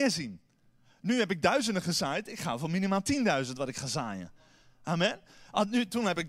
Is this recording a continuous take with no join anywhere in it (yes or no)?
yes